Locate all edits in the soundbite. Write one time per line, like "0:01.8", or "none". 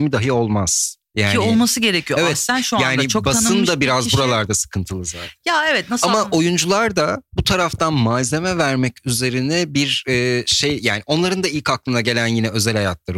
none